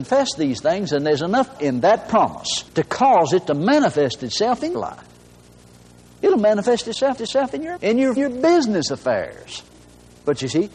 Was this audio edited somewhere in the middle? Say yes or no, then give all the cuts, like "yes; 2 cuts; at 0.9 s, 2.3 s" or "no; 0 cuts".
yes; 6 cuts; at 1.6 s, 2.7 s, 4.7 s, 7.2 s, 7.8 s, 8.2 s